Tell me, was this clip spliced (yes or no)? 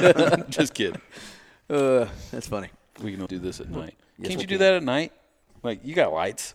yes